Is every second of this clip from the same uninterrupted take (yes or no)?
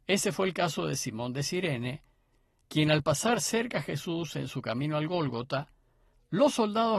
yes